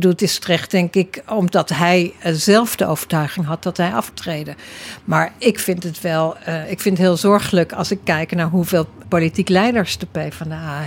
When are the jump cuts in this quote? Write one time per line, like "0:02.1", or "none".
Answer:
0:04.1
0:06.6
0:09.0